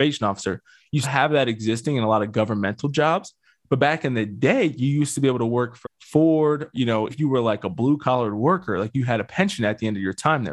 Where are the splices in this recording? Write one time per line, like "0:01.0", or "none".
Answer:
0:01.0
0:05.8
0:06.7
0:07.1